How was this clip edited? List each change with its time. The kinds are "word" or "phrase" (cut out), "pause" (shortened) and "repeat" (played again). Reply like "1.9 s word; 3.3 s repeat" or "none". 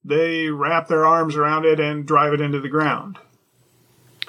none